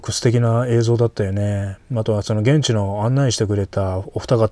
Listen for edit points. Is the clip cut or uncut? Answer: cut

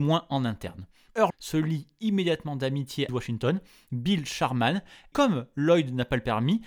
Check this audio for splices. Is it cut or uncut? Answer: cut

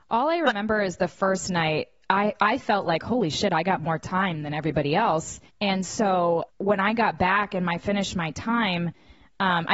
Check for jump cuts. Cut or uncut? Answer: cut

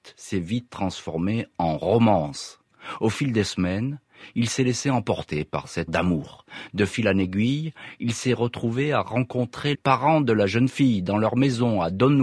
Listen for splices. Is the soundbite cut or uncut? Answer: cut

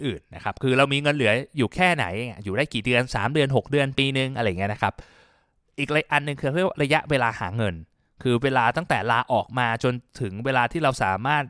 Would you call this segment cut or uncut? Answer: uncut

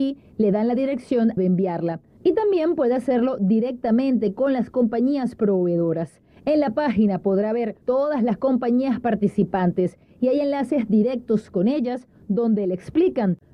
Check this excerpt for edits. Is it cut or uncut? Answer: cut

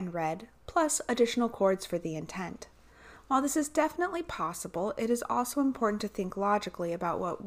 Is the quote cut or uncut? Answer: uncut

